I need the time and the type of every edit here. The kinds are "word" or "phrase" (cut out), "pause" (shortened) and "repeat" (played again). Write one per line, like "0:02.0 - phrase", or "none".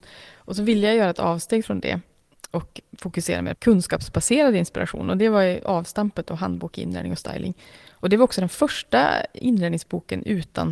0:03.5 - word